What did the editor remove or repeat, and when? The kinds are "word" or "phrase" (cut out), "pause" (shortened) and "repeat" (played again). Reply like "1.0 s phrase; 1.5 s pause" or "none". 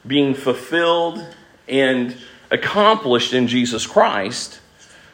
none